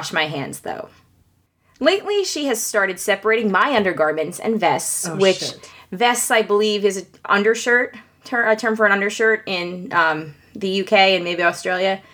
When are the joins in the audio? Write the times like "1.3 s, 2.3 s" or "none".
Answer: none